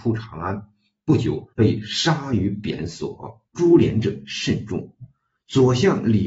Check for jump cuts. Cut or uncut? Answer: cut